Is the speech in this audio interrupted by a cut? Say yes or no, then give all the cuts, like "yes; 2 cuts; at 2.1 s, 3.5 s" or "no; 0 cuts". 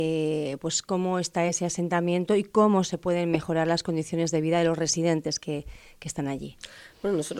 no; 0 cuts